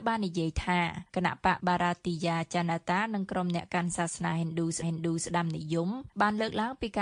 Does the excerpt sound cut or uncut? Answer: cut